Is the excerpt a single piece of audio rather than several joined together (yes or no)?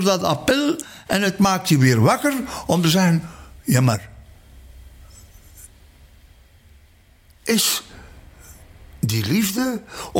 yes